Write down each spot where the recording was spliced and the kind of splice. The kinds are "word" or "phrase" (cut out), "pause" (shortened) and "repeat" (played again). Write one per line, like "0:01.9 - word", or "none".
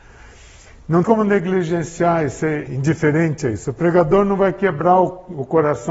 0:01.0 - word
0:02.7 - word